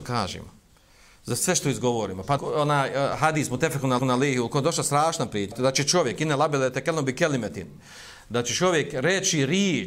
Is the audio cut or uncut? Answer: cut